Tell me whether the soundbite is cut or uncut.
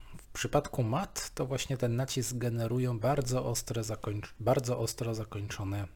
uncut